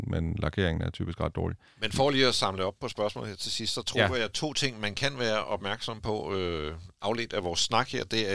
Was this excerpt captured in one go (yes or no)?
yes